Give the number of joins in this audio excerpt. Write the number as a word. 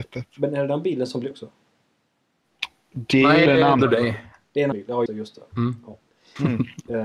five